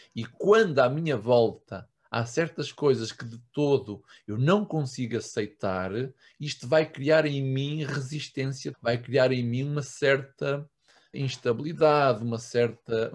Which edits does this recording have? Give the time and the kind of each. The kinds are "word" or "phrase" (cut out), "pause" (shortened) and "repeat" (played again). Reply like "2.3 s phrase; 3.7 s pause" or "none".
8.7 s word; 11.1 s word